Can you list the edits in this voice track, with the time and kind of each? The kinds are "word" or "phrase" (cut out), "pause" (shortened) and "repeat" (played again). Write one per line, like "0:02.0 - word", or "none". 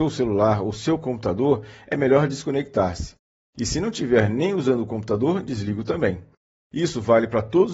none

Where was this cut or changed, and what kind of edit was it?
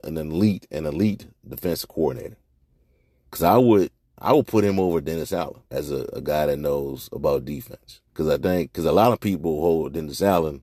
0:05.7 - pause
0:08.1 - pause

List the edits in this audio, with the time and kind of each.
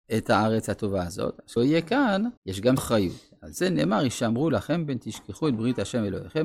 0:01.6 - phrase
0:02.4 - pause
0:02.8 - phrase

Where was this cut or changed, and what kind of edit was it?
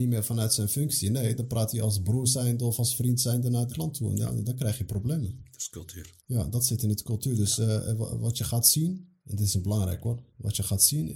0:03.7 - word
0:06.2 - pause
0:09.2 - pause

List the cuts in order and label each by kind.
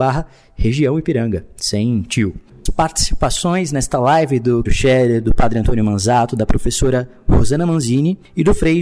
0:02.7 - phrase
0:04.7 - phrase

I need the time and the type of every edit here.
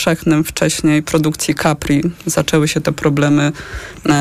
0:01.0 - word

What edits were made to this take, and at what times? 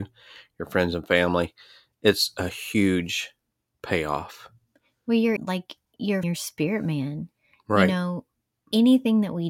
0:05.4 - word
0:06.2 - word

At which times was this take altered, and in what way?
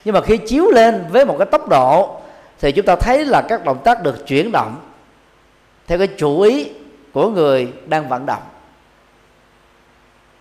none

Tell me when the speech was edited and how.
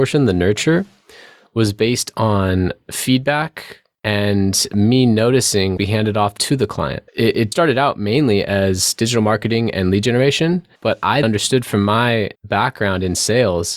0:05.8 - phrase
0:06.4 - word
0:07.1 - pause
0:07.5 - word
0:10.8 - pause
0:11.2 - word
0:12.3 - pause

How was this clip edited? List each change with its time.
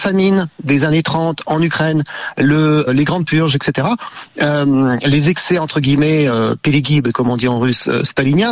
0:02.9 - word

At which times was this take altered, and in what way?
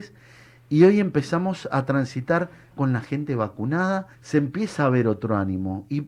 0:02.7 - word
0:04.1 - pause

